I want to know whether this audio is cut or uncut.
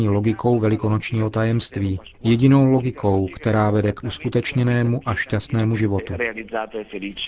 cut